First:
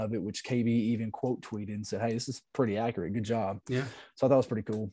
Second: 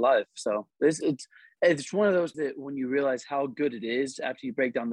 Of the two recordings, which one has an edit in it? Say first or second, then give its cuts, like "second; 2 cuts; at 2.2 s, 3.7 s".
second; 2 cuts; at 1.0 s, 2.3 s